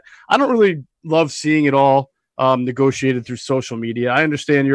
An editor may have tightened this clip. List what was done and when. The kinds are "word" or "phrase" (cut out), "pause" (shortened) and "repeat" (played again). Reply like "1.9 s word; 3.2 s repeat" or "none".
none